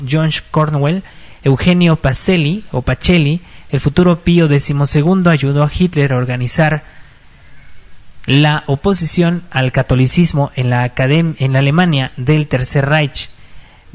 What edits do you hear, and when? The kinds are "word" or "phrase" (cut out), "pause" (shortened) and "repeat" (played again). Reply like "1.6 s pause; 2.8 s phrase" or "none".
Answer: none